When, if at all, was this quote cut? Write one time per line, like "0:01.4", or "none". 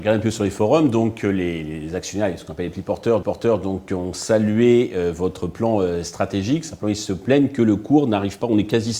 0:03.2